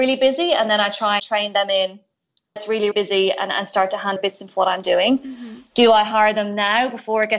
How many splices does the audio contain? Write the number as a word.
five